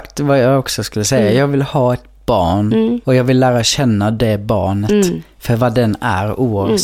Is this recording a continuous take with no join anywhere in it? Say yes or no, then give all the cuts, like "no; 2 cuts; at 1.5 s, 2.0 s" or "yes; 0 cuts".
no; 1 cut; at 3.0 s